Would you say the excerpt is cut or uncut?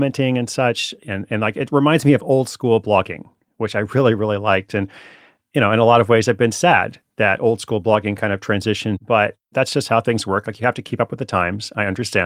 uncut